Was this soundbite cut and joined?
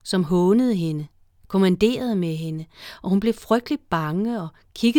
yes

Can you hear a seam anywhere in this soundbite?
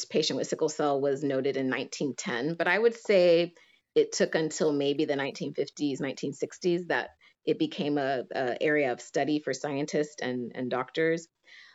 no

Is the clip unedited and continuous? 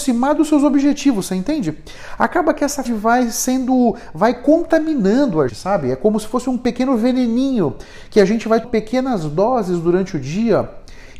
no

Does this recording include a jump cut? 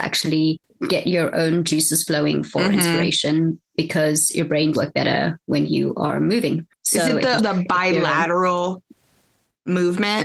yes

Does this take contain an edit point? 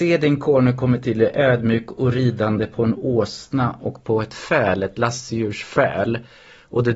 no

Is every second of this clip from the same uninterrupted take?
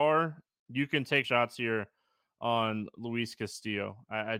no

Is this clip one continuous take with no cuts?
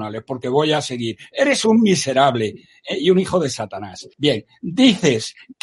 no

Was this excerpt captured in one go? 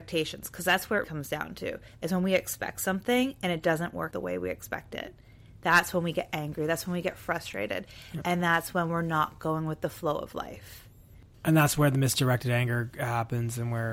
no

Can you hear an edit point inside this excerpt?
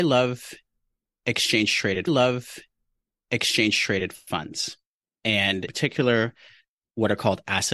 yes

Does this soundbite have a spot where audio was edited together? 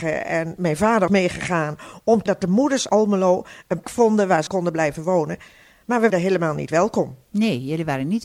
yes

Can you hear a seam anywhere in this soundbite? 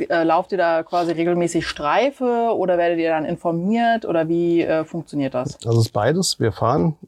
no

